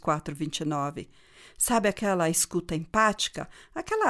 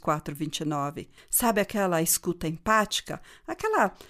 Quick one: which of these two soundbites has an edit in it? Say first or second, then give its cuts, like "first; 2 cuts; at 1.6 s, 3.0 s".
second; 1 cut; at 1.2 s